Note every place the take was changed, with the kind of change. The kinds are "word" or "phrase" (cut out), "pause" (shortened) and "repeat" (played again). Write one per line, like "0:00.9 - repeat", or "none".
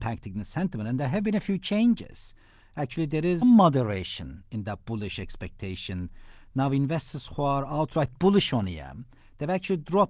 0:03.4 - word